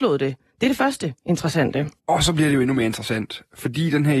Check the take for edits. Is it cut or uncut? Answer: cut